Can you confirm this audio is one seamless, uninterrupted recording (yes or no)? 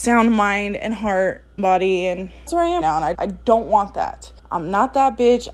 no